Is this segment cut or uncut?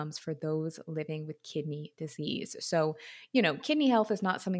uncut